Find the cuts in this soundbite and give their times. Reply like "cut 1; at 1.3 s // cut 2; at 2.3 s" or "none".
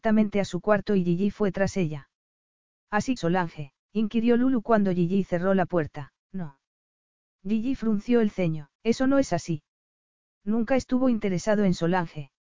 cut 1; at 3.2 s // cut 2; at 3.8 s // cut 3; at 6.2 s // cut 4; at 8.7 s